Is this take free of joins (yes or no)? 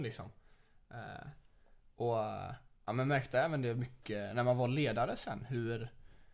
yes